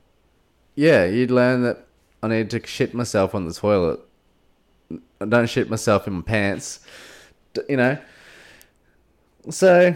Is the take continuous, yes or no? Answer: yes